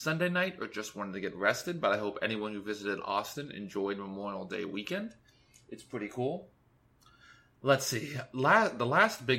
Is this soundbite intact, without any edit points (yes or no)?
yes